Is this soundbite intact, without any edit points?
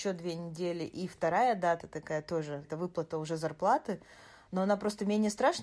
no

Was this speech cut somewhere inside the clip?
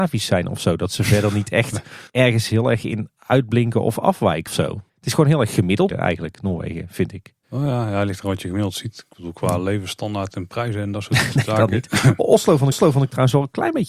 yes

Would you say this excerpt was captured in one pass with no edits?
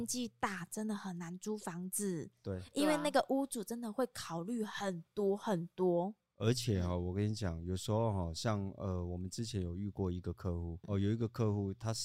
no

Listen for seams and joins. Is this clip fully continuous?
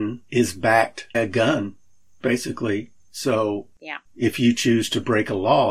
no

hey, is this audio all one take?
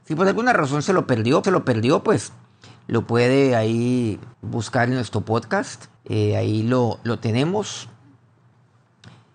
no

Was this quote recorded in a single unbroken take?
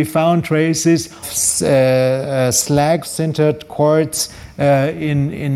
no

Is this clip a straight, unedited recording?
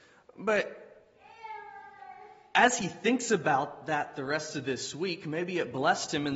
yes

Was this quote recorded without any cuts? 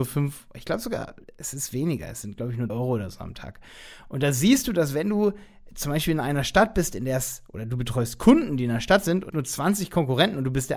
no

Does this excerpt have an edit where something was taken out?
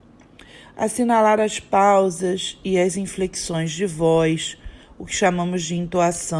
no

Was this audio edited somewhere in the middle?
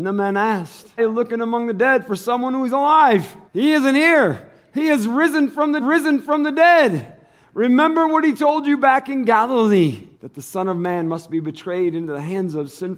yes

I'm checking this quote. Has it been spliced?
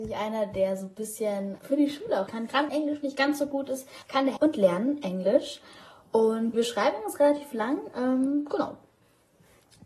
yes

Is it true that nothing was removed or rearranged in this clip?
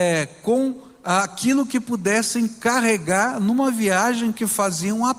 yes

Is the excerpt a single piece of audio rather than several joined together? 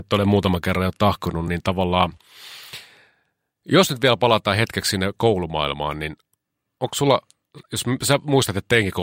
yes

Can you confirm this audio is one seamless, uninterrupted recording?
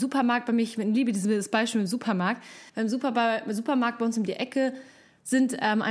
no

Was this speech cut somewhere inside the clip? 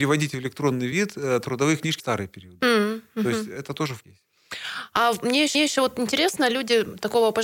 yes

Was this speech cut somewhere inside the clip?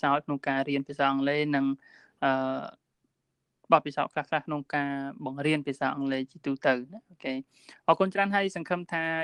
no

